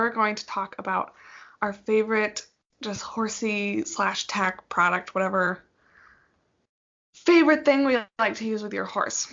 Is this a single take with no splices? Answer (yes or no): yes